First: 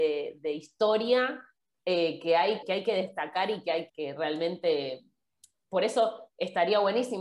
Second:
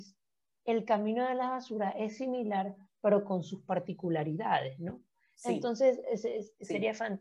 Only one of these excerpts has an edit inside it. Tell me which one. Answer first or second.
first